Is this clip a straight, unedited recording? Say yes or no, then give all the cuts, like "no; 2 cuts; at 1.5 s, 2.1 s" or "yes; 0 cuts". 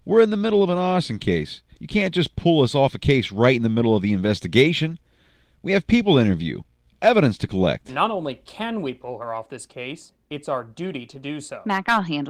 yes; 0 cuts